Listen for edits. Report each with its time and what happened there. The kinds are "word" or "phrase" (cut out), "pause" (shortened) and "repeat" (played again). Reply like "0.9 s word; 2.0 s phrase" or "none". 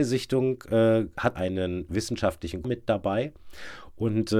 1.4 s word; 2.6 s word